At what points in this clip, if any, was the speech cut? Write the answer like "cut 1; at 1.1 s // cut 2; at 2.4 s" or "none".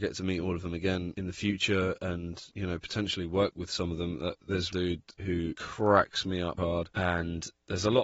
cut 1; at 4.7 s // cut 2; at 6.6 s